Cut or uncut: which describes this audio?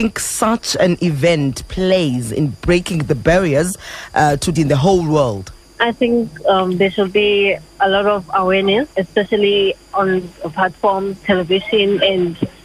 cut